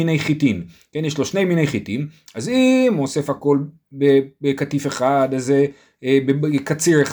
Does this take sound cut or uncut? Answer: uncut